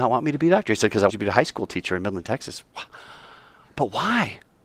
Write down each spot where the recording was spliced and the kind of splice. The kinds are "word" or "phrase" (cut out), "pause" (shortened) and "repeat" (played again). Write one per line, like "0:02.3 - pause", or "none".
0:01.1 - word